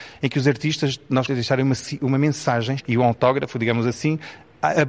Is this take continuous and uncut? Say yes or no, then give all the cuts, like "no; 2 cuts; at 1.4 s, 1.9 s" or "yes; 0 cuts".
no; 2 cuts; at 1.3 s, 2.8 s